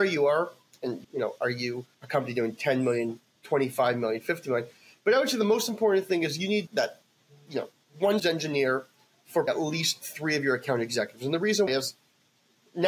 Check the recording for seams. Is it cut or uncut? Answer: cut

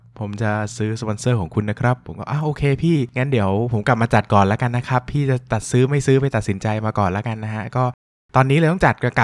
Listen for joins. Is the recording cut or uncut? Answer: uncut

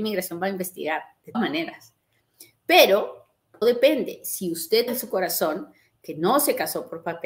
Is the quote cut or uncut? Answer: cut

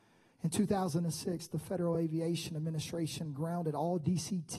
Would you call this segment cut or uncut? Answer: uncut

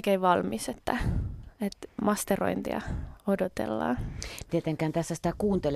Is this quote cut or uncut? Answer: cut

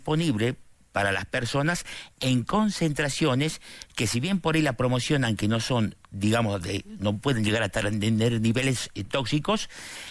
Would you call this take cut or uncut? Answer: uncut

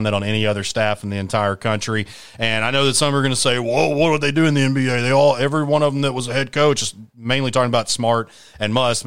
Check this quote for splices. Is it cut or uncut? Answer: uncut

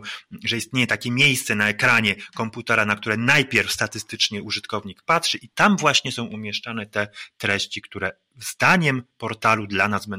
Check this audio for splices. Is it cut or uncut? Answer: uncut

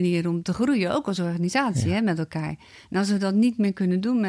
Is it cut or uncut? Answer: uncut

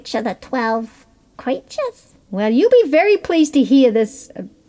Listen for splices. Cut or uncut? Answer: cut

